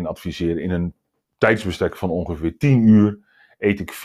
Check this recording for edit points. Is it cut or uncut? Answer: uncut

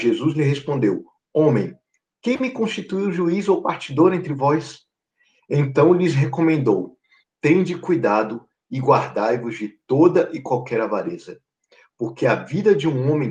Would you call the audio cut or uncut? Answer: uncut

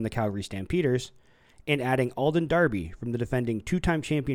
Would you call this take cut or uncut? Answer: uncut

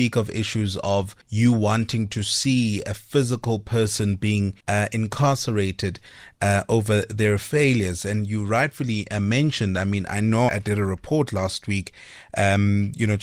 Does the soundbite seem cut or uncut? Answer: cut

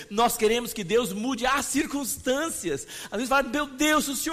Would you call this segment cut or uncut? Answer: uncut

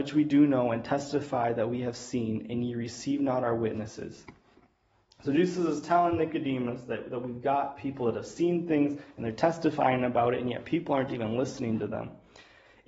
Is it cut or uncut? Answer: uncut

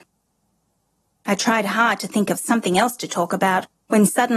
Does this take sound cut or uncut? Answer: uncut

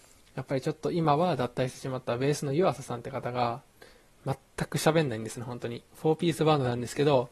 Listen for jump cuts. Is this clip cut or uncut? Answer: cut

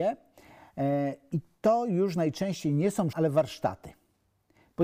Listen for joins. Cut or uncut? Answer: cut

